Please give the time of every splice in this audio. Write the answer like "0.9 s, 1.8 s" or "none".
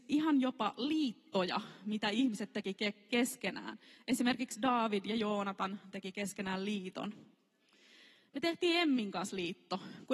none